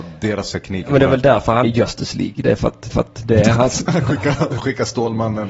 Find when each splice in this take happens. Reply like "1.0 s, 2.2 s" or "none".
1.6 s, 2.9 s, 3.7 s